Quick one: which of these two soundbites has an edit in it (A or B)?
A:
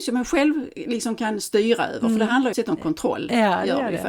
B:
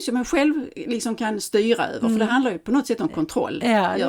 A